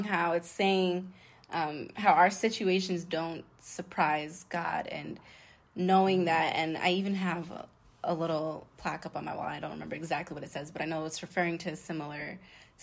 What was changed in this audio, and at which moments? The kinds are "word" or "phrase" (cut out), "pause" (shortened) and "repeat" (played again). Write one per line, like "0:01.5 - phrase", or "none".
none